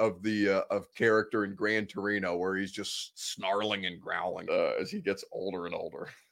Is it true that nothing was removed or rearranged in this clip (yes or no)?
no